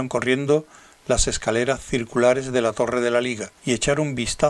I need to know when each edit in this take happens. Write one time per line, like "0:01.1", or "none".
0:03.6